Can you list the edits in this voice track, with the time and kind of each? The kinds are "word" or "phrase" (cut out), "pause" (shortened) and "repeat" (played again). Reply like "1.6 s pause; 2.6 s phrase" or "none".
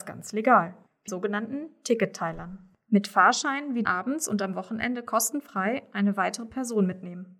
1.1 s phrase; 3.8 s phrase